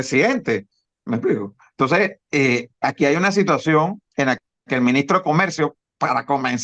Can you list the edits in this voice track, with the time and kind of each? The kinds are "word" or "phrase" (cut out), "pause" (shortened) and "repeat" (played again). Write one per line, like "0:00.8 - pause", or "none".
0:02.7 - pause
0:04.1 - pause